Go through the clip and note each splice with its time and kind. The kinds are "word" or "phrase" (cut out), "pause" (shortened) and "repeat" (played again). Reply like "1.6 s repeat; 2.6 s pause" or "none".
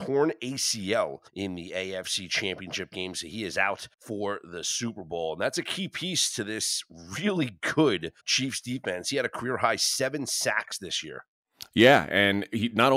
1.3 s pause; 3.9 s pause; 8.2 s pause